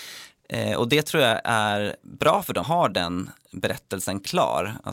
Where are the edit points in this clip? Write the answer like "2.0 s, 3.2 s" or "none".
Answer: 2.6 s

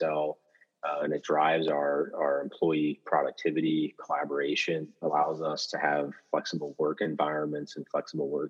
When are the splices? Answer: 5.0 s

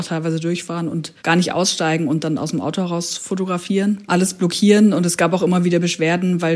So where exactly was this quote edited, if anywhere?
1.2 s

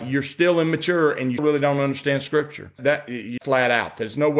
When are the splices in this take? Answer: 1.4 s, 3.4 s

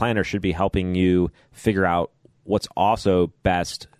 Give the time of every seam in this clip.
none

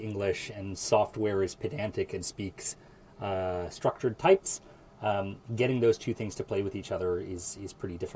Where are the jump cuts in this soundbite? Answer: none

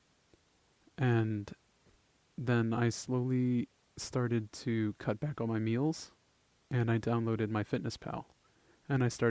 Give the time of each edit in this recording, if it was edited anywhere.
none

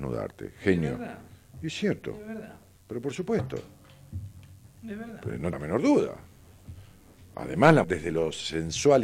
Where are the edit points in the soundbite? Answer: 5.5 s, 7.8 s

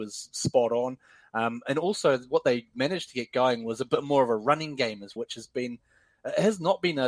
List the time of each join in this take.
5.2 s

